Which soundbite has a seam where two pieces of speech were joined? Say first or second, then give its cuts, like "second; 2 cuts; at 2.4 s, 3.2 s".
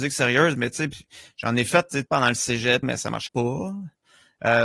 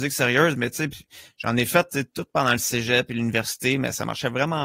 first; 3 cuts; at 2.1 s, 2.8 s, 3.3 s